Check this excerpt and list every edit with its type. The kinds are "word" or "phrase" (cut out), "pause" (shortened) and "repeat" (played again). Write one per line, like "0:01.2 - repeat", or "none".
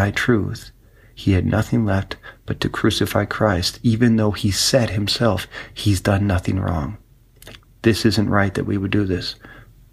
none